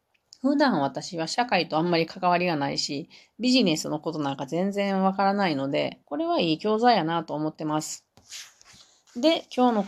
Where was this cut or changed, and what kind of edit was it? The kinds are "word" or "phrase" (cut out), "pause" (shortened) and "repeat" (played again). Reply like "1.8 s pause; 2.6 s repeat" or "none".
6.0 s pause

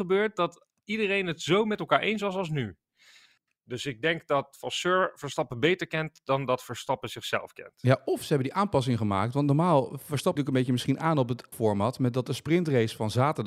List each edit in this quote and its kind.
10.4 s word; 11.5 s word

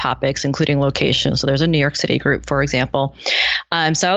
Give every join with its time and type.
none

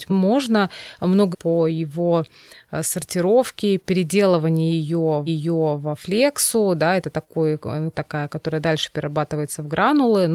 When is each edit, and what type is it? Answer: 1.3 s phrase; 5.3 s repeat; 7.9 s word

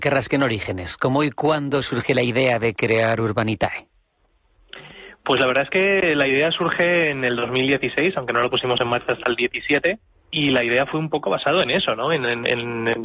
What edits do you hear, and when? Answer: none

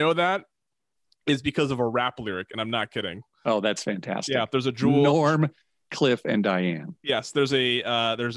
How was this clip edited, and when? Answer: none

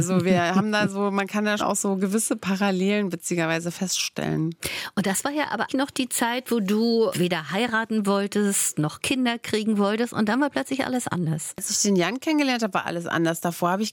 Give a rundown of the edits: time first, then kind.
1.6 s word; 5.7 s word; 7.1 s word

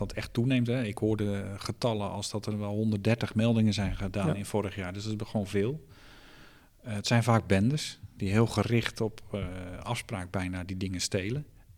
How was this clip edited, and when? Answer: none

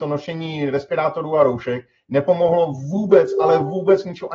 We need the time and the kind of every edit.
none

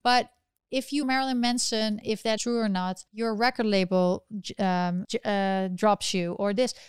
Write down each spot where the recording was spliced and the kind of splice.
1.0 s word; 2.0 s word; 2.4 s word; 3.1 s pause; 5.0 s word

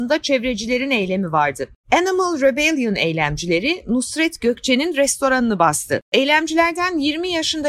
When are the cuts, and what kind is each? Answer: none

